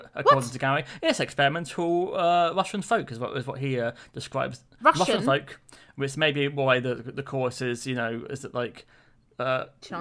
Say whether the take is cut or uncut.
uncut